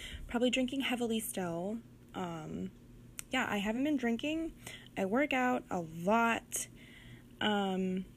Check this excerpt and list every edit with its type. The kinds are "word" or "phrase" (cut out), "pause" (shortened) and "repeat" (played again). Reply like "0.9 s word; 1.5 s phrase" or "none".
none